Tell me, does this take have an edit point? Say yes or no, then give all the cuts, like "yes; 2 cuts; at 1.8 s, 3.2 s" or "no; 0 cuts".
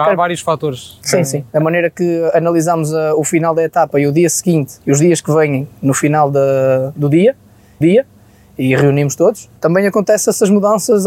yes; 4 cuts; at 1.5 s, 4.8 s, 7.8 s, 9.6 s